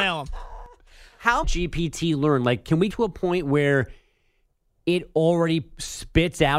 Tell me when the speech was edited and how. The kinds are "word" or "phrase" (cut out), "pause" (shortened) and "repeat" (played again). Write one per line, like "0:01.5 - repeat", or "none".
0:01.4 - phrase
0:02.9 - word